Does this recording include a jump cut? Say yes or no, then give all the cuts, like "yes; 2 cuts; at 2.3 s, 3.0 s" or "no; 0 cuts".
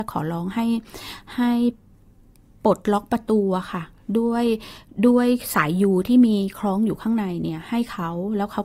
no; 0 cuts